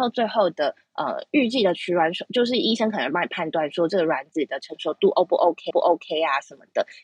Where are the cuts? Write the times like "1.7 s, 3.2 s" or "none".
5.7 s